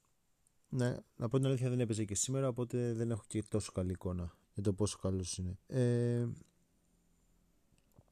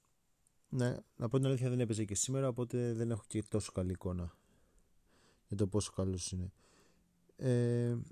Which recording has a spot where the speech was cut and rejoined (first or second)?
first